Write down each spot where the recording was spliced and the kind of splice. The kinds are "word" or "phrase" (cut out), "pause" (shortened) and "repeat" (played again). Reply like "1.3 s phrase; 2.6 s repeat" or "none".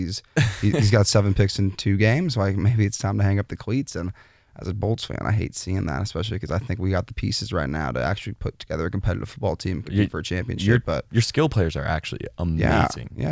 none